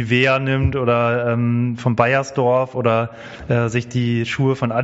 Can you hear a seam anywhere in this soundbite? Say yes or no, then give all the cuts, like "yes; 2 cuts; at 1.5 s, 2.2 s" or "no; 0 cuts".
no; 0 cuts